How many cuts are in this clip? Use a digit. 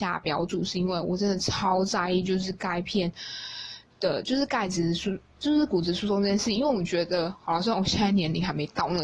0